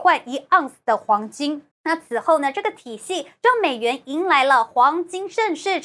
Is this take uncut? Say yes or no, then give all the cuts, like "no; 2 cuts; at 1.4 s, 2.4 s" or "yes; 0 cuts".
no; 1 cut; at 1.7 s